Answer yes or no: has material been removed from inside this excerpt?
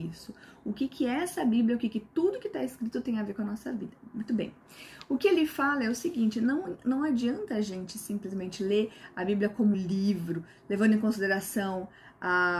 yes